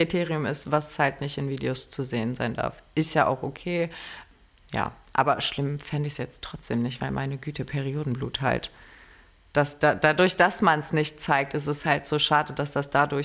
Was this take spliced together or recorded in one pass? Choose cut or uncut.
uncut